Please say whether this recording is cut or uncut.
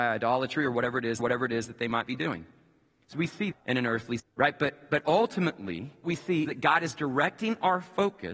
cut